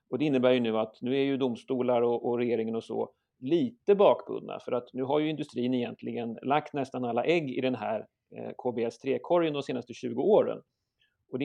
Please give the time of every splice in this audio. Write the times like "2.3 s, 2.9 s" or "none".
none